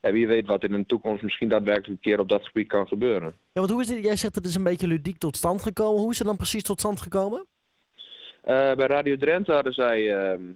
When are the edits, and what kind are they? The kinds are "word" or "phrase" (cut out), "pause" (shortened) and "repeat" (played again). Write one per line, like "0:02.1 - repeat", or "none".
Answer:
none